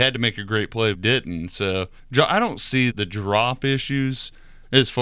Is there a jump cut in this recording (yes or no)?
yes